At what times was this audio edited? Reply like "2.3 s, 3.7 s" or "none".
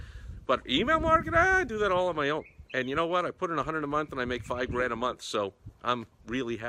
5.8 s